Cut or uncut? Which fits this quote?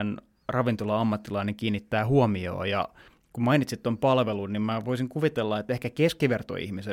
uncut